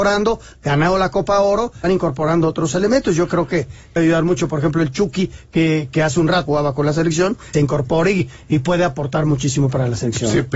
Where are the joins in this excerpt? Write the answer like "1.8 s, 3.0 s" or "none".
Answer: 1.8 s, 4.0 s, 6.5 s, 7.5 s